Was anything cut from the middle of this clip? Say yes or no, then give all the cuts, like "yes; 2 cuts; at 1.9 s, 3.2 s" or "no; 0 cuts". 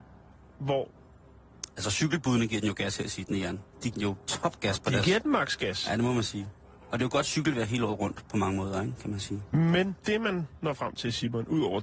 yes; 2 cuts; at 3.9 s, 10.0 s